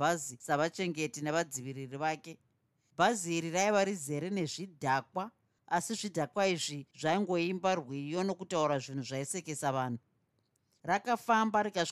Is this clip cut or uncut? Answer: uncut